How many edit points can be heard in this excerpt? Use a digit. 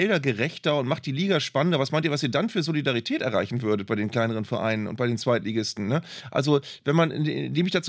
0